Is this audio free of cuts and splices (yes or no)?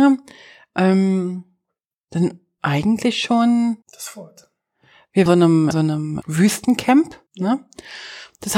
no